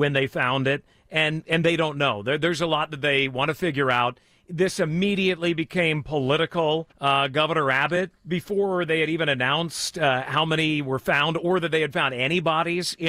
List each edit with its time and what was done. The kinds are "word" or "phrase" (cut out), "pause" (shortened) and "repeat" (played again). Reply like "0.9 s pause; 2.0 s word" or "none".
6.9 s pause; 8.2 s pause